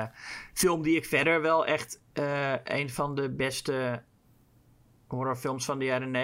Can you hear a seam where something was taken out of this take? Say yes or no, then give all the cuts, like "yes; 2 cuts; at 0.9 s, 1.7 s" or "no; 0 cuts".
no; 0 cuts